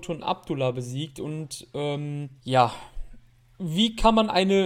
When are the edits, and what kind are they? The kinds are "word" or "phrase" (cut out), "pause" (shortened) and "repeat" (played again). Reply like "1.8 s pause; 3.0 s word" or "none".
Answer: 2.4 s pause